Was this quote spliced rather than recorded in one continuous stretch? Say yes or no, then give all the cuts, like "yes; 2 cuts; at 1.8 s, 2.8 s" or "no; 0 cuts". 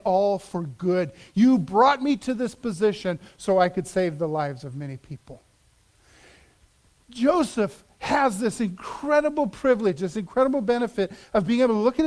no; 0 cuts